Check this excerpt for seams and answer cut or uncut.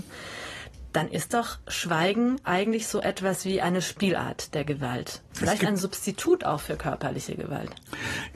uncut